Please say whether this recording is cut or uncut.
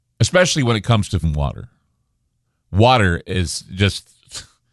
cut